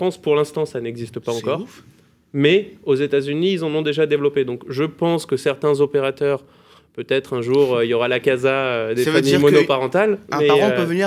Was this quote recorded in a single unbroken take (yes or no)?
yes